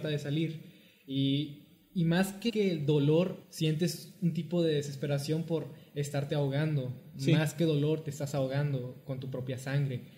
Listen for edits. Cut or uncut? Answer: cut